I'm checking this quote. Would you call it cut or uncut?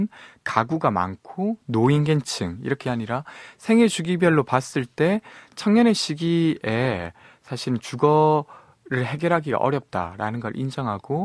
cut